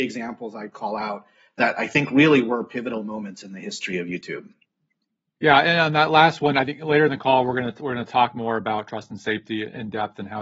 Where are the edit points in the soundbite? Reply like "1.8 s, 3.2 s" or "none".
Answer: none